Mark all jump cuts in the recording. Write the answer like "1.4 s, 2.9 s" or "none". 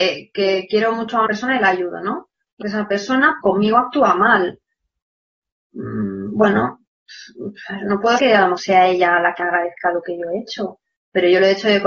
1.3 s, 2.6 s, 3.4 s, 8.2 s, 8.6 s, 9.4 s